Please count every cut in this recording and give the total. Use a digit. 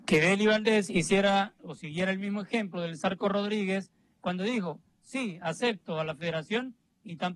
0